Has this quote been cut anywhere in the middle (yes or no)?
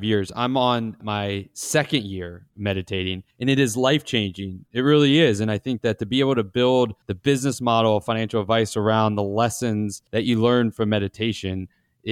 yes